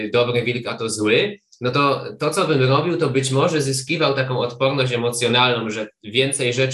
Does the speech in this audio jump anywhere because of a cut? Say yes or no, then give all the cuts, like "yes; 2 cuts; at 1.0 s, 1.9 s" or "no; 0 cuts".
no; 0 cuts